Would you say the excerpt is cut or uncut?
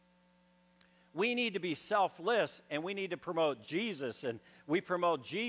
uncut